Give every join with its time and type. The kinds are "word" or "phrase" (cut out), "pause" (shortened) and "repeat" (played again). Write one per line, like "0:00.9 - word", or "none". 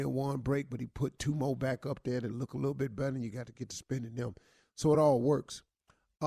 none